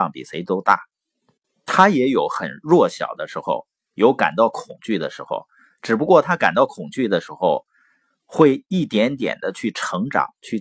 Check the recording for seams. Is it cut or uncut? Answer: uncut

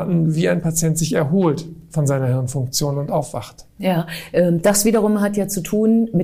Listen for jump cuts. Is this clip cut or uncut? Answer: uncut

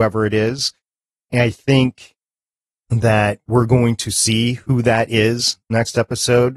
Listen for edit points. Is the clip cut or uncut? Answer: uncut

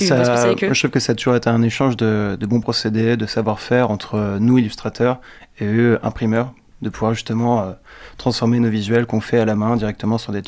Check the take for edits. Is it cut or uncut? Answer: uncut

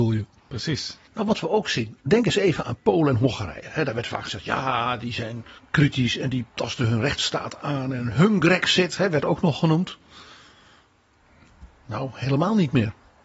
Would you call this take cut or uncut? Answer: cut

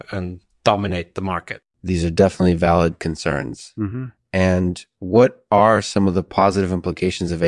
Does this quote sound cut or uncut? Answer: cut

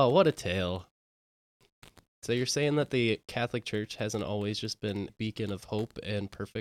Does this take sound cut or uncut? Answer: cut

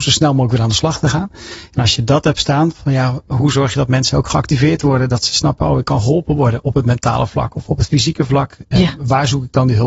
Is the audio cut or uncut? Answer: uncut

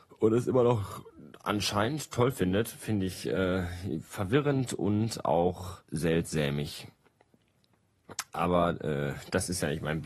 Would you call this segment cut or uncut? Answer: cut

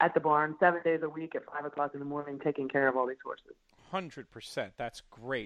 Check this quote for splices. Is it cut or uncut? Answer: uncut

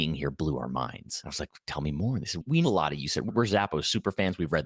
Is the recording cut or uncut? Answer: cut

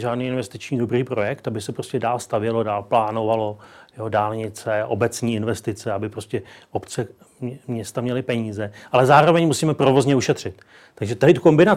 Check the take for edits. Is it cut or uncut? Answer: uncut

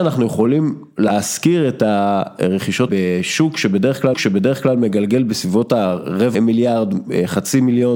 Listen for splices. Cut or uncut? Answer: cut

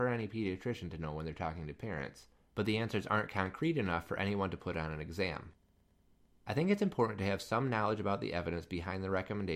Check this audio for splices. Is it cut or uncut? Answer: uncut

